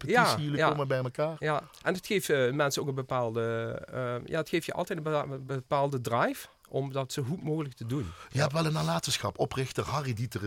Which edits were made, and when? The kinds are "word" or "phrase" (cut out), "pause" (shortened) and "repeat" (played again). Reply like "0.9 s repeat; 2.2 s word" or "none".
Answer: none